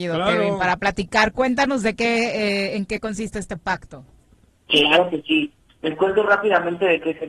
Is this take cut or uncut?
uncut